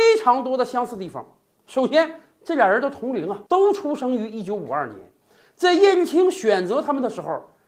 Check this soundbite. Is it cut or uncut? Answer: cut